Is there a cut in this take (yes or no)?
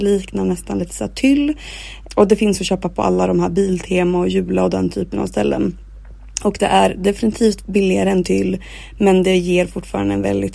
no